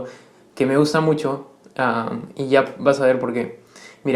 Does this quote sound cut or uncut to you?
uncut